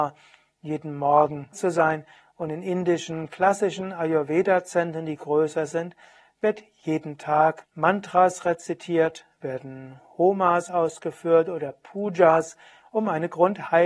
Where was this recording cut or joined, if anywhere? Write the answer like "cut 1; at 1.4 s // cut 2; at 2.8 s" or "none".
cut 1; at 1.5 s // cut 2; at 7.6 s